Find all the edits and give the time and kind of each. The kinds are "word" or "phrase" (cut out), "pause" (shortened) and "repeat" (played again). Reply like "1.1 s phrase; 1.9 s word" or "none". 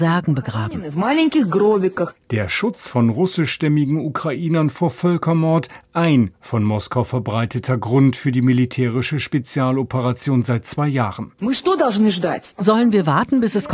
none